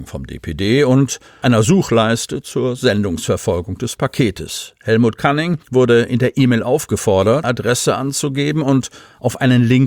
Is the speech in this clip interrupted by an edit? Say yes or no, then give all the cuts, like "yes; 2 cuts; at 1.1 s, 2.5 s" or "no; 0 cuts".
yes; 2 cuts; at 5.6 s, 7.4 s